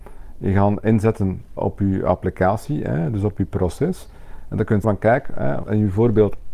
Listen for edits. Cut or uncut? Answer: cut